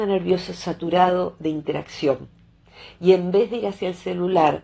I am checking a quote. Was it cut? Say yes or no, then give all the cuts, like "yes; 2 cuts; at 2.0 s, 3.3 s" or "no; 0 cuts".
no; 0 cuts